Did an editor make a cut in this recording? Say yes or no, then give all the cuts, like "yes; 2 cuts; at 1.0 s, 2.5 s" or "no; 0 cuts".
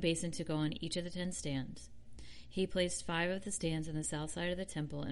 no; 0 cuts